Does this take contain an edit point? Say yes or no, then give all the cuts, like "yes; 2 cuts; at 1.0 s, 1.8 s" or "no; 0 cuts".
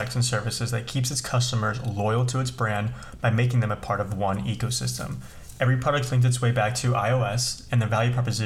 no; 0 cuts